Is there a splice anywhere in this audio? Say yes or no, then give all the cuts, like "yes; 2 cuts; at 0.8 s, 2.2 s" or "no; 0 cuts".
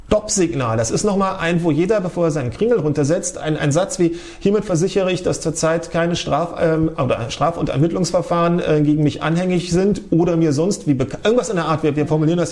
yes; 1 cut; at 3.6 s